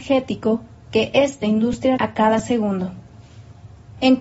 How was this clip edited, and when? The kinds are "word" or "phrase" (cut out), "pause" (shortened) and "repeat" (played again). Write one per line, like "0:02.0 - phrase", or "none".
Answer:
0:02.0 - word